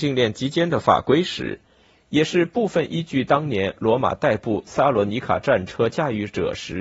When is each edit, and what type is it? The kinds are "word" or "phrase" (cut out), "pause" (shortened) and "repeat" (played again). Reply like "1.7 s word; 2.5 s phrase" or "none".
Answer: none